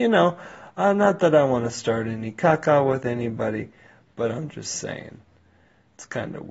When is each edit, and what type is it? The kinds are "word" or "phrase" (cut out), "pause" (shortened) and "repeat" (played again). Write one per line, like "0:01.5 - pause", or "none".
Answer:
none

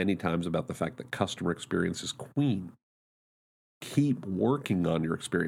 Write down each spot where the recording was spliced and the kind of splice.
none

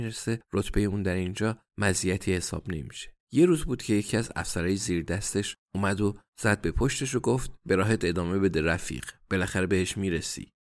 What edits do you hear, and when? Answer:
0:06.3 - pause

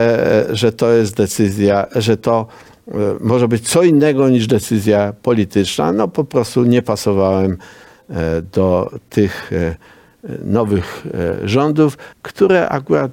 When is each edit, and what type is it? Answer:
0:12.1 - pause

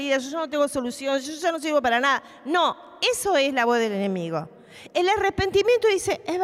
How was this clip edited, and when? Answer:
none

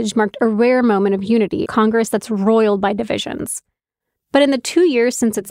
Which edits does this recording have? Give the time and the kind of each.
0:01.7 - phrase

